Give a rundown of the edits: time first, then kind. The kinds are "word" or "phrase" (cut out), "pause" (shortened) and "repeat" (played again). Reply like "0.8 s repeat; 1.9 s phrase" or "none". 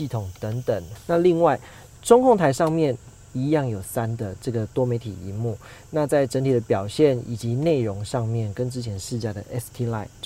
3.8 s word